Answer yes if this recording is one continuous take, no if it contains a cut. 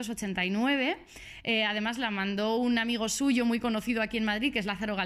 yes